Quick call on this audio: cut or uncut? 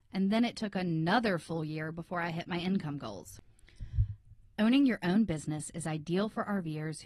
cut